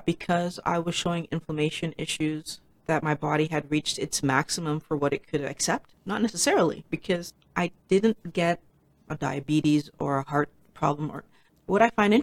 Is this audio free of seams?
yes; 0 cuts

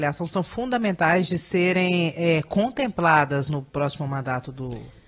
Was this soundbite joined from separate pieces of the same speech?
no; 0 cuts

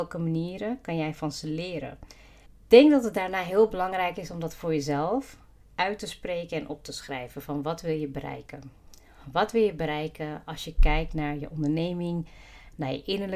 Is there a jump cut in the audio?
yes; 1 cut; at 2.5 s

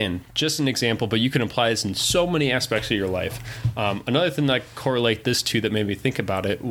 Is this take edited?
no; 0 cuts

